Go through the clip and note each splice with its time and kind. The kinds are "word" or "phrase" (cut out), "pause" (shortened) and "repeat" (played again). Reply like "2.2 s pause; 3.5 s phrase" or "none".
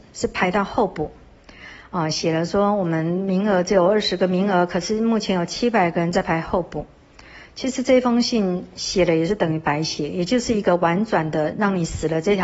none